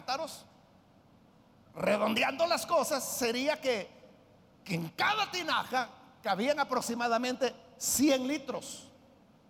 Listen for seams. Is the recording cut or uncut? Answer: uncut